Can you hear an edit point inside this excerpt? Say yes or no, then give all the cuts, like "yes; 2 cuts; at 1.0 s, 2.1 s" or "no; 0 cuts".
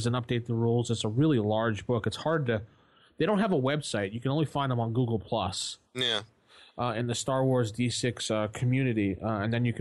yes; 1 cut; at 5.9 s